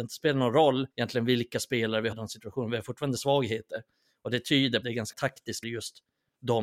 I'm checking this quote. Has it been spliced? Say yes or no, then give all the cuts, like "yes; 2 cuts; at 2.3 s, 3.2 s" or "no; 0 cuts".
yes; 6 cuts; at 0.9 s, 2.1 s, 3.2 s, 4.8 s, 5.1 s, 5.6 s